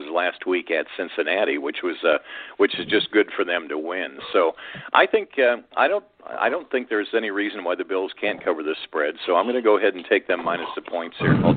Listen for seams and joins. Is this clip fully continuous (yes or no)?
yes